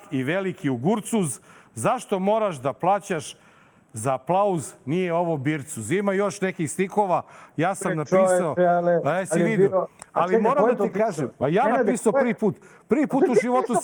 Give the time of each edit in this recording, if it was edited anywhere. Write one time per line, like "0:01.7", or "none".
none